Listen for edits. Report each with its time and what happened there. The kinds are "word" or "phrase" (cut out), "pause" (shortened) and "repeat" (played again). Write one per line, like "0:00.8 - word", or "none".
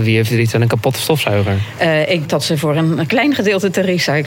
0:02.2 - word